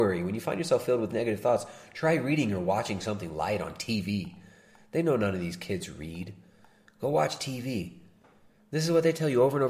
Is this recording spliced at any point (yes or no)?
no